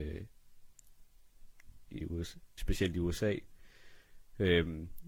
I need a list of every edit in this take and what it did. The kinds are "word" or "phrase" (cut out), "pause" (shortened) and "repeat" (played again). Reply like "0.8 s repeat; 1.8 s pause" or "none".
2.0 s word; 2.6 s phrase